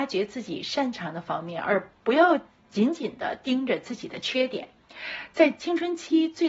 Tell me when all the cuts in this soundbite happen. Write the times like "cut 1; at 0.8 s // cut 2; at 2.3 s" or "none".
cut 1; at 1.9 s // cut 2; at 2.5 s